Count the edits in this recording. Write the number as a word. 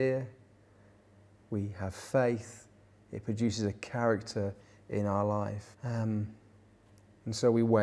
one